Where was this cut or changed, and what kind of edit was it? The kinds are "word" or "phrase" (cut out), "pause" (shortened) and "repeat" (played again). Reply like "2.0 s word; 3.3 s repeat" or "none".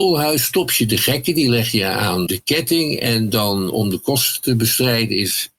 2.3 s word